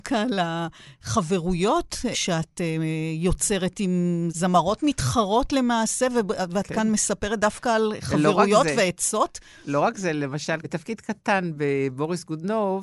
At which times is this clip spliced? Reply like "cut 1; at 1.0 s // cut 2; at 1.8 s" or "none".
cut 1; at 10.6 s